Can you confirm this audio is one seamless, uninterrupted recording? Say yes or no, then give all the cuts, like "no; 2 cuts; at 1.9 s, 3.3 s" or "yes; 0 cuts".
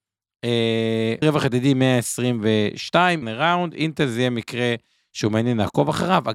no; 2 cuts; at 1.2 s, 3.2 s